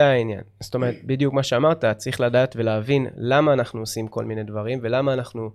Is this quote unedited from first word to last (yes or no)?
yes